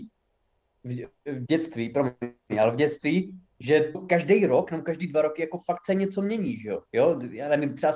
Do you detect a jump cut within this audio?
yes; 2 cuts; at 3.9 s, 6.9 s

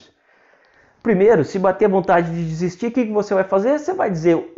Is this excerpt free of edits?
yes; 0 cuts

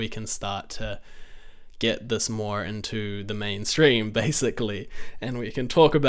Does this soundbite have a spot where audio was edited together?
no; 0 cuts

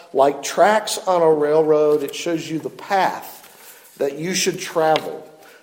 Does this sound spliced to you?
no; 0 cuts

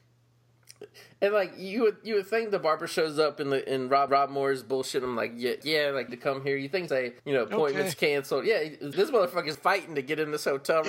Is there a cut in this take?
yes; 7 cuts; at 4.1 s, 5.6 s, 6.1 s, 6.9 s, 7.2 s, 8.9 s, 9.5 s

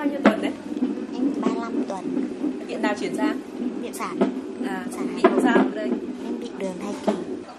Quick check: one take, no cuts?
no; 4 cuts; at 1.3 s, 3.9 s, 5.7 s, 6.6 s

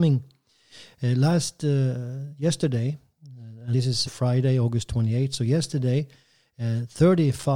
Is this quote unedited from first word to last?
no; 2 cuts; at 3.7 s, 4.1 s

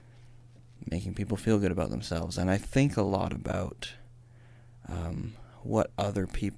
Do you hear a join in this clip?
no; 0 cuts

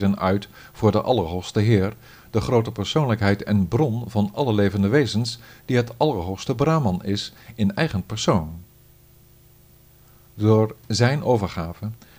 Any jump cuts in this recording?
no; 0 cuts

